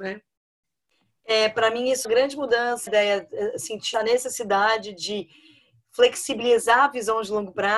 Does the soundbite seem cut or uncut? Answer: cut